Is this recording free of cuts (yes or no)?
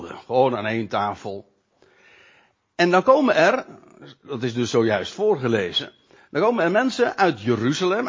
yes